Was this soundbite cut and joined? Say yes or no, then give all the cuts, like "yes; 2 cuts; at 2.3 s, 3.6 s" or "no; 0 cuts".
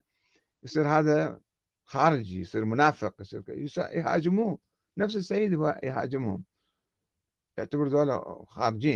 no; 0 cuts